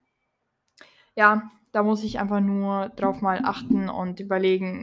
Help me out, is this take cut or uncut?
uncut